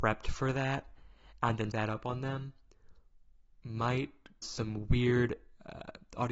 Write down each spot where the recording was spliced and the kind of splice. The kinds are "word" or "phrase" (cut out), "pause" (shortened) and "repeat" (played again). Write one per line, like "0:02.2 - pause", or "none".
0:01.7 - word
0:04.4 - word